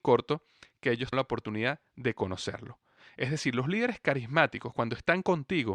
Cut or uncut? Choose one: cut